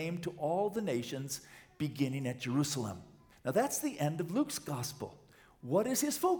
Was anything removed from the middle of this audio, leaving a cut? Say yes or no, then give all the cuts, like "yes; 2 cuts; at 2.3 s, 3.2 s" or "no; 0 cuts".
yes; 1 cut; at 3.3 s